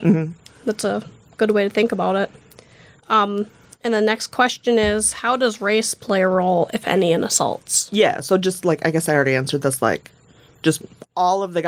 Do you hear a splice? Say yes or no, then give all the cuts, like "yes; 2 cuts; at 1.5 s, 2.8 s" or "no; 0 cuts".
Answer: no; 0 cuts